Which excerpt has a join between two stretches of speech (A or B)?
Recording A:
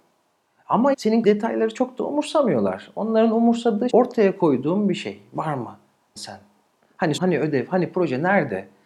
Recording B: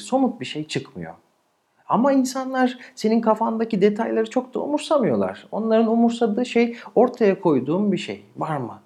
A